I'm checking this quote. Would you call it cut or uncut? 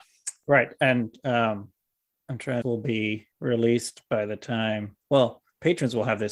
cut